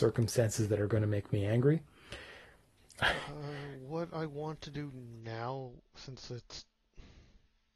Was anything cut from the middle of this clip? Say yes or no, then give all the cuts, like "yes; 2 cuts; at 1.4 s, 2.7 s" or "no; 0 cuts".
no; 0 cuts